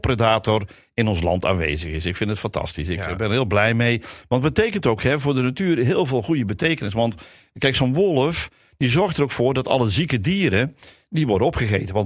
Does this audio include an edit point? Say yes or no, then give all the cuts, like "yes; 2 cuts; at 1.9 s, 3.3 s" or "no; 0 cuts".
no; 0 cuts